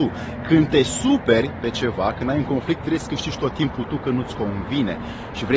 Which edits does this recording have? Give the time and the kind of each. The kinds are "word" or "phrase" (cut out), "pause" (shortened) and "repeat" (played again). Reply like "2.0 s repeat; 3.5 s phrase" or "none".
none